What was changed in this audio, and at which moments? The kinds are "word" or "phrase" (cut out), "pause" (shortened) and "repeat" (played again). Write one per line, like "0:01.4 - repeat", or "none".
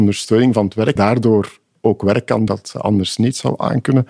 0:01.0 - word
0:02.5 - word

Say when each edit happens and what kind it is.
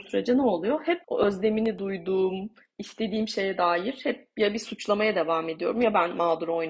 0:01.0 - pause

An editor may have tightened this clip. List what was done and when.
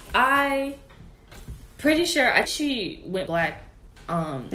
0:02.4 - word
0:03.3 - word

